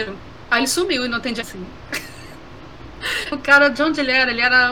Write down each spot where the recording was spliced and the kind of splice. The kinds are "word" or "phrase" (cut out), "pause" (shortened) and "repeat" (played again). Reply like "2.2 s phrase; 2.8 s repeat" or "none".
1.4 s phrase; 3.3 s word